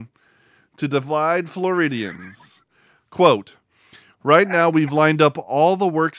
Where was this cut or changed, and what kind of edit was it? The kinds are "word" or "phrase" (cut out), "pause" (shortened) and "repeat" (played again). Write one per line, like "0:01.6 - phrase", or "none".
none